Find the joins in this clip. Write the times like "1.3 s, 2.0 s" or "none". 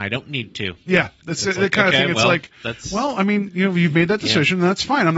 none